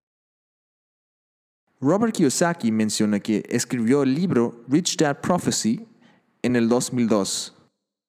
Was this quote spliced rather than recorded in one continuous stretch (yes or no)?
no